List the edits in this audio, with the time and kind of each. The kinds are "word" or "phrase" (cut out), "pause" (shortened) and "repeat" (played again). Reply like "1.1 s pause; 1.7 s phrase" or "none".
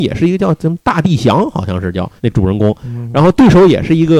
2.2 s pause